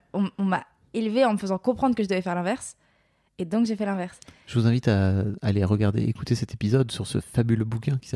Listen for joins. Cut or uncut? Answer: uncut